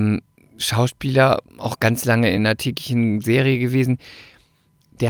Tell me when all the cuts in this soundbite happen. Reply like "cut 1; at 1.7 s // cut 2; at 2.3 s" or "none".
none